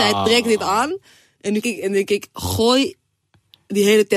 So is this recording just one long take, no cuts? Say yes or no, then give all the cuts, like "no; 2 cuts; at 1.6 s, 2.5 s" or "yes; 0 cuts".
no; 1 cut; at 1.6 s